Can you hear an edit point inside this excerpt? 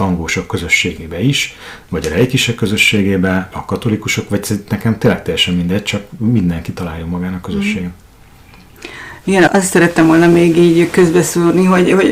yes; 2 cuts; at 3.5 s, 9.5 s

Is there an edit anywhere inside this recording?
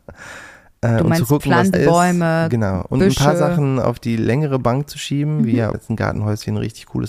yes; 2 cuts; at 1.7 s, 5.7 s

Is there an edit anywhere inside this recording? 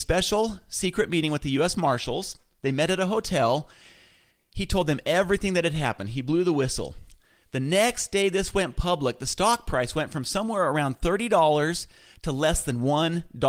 no; 0 cuts

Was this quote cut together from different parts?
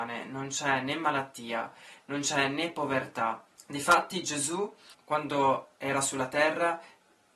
no; 0 cuts

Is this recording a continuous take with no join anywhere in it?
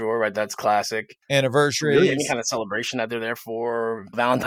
no; 1 cut; at 1.2 s

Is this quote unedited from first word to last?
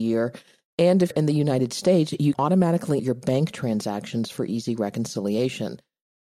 no; 3 cuts; at 1.1 s, 2.3 s, 3.0 s

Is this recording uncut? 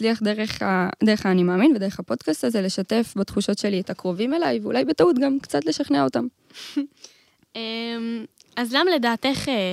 yes; 0 cuts

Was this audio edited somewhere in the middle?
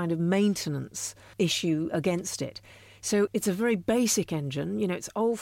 no; 0 cuts

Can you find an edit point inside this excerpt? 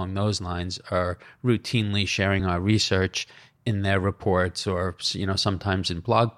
no; 0 cuts

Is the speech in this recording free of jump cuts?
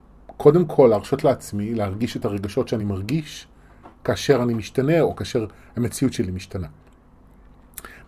yes; 0 cuts

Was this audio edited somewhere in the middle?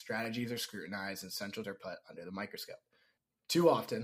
yes; 1 cut; at 1.6 s

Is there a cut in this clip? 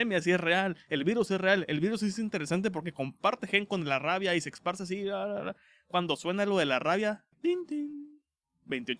yes; 1 cut; at 7.3 s

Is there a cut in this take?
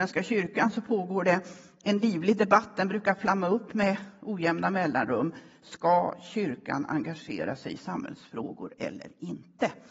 no; 0 cuts

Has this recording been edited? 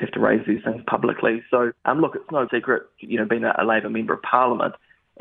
yes; 3 cuts; at 1.8 s, 2.5 s, 3.0 s

